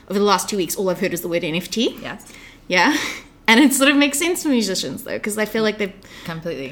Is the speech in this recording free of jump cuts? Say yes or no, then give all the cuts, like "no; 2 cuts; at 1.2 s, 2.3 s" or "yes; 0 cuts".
yes; 0 cuts